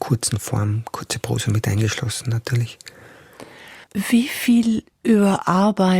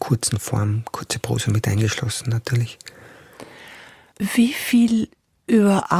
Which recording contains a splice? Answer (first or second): first